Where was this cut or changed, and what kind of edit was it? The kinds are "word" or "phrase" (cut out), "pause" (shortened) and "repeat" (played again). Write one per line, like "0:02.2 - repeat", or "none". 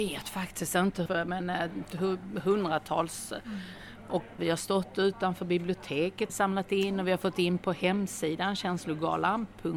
0:01.1 - word
0:04.4 - word
0:06.3 - word